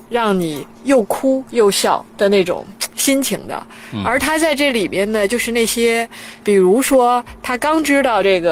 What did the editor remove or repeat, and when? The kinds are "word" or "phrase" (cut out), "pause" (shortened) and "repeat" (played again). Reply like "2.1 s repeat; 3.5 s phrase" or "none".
2.1 s pause; 6.4 s word